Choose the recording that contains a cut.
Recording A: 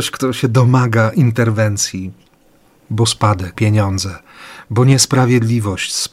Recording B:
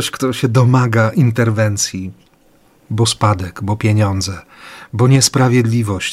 A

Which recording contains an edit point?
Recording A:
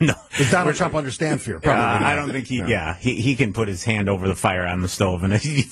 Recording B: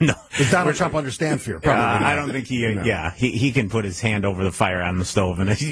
A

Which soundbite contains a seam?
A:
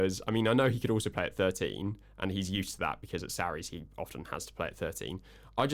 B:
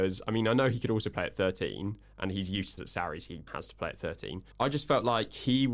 B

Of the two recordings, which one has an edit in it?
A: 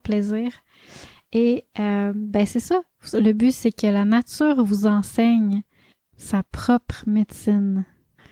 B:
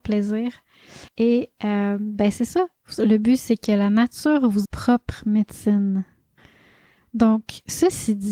B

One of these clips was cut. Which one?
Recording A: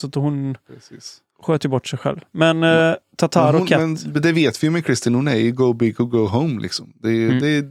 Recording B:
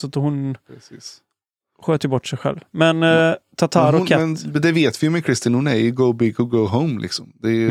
A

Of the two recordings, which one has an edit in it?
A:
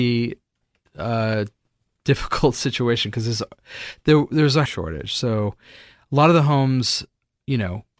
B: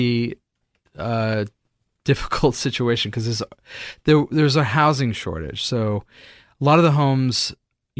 A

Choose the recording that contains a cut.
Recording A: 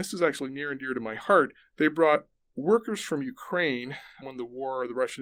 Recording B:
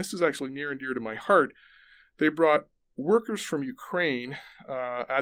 A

